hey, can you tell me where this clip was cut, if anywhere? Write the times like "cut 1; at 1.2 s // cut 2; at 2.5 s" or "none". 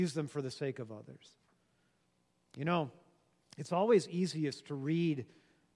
none